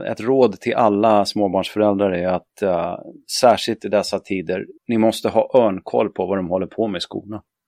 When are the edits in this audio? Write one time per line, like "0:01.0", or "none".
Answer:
0:04.8